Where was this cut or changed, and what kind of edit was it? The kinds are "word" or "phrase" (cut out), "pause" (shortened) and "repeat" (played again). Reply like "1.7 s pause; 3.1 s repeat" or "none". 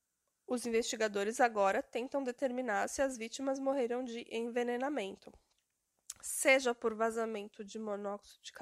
none